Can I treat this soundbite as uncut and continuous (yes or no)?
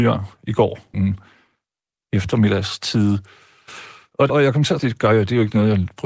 no